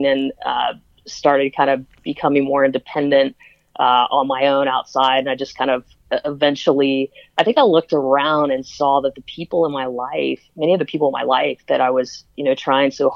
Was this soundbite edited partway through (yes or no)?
no